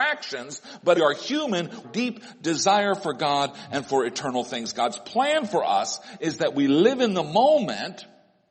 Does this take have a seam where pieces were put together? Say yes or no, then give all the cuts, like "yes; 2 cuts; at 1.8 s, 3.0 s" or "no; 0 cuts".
yes; 2 cuts; at 0.9 s, 1.8 s